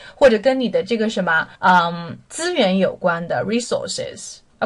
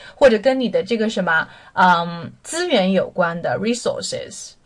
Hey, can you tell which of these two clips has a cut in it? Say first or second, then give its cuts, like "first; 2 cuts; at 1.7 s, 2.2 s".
first; 1 cut; at 1.5 s